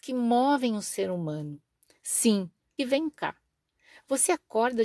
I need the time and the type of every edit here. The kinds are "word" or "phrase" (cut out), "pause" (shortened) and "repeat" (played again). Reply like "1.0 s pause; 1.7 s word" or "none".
2.8 s word